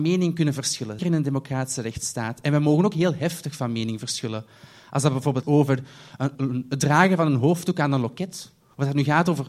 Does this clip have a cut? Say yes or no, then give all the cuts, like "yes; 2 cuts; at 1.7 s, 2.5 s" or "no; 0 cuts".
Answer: yes; 3 cuts; at 1.0 s, 5.4 s, 6.3 s